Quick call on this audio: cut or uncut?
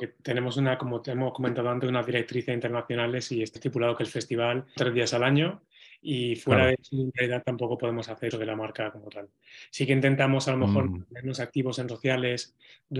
cut